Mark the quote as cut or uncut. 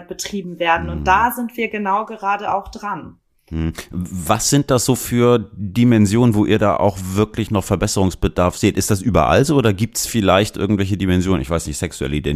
uncut